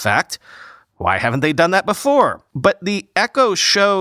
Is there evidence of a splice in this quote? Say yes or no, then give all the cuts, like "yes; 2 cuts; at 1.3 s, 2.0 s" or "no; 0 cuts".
yes; 1 cut; at 2.5 s